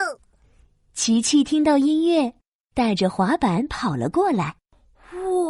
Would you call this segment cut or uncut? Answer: uncut